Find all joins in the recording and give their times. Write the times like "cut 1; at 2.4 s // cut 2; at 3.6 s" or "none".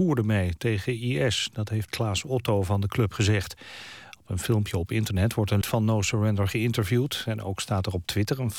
cut 1; at 1.9 s // cut 2; at 5.6 s

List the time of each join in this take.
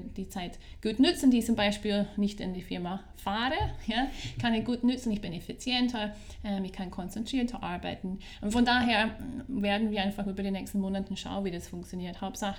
none

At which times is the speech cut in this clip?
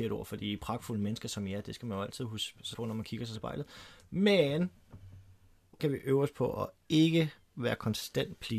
cut 1; at 2.7 s // cut 2; at 3.3 s // cut 3; at 5.8 s

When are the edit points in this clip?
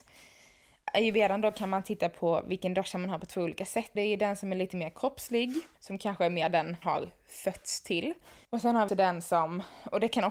cut 1; at 4.0 s // cut 2; at 5.7 s // cut 3; at 6.8 s // cut 4; at 8.4 s // cut 5; at 8.9 s

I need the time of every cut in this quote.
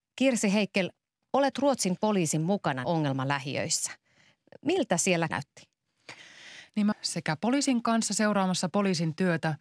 cut 1; at 1.5 s // cut 2; at 2.8 s // cut 3; at 5.3 s // cut 4; at 6.9 s

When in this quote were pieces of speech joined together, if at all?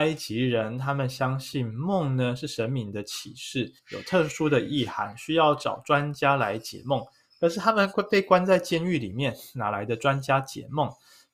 cut 1; at 3.8 s

